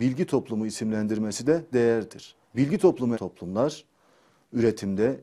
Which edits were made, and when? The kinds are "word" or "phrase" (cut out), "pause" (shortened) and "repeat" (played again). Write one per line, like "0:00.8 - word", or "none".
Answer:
0:01.7 - word
0:02.4 - pause
0:03.1 - phrase